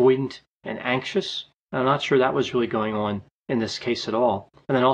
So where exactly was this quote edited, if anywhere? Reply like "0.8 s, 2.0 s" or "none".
none